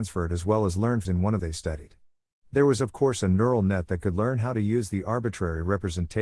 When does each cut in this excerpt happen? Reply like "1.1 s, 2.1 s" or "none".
1.1 s, 1.4 s